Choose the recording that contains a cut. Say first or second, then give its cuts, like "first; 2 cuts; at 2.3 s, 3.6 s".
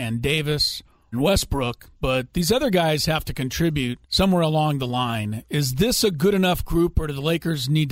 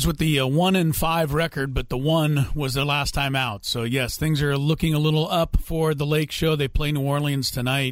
first; 3 cuts; at 1.1 s, 1.9 s, 4.0 s